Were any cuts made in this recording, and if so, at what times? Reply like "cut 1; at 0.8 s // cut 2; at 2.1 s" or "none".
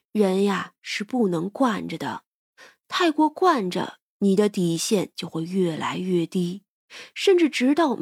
none